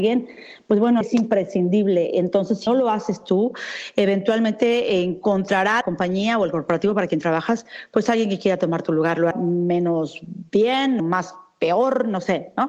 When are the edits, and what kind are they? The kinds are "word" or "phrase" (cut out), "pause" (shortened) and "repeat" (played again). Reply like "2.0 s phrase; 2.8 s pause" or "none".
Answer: 1.0 s word; 2.7 s word; 5.8 s word; 9.3 s word; 11.0 s word